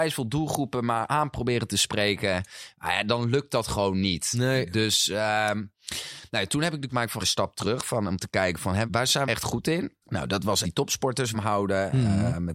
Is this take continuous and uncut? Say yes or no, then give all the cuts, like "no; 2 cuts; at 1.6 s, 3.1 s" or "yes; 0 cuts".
no; 7 cuts; at 6.9 s, 7.2 s, 8.9 s, 9.3 s, 10.0 s, 10.6 s, 11.3 s